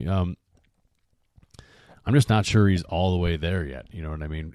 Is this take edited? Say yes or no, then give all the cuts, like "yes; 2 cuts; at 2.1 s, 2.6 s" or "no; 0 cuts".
no; 0 cuts